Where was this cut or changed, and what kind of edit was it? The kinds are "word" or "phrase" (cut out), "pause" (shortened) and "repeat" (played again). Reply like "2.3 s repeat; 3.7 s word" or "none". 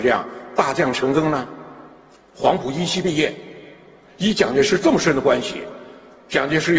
2.1 s pause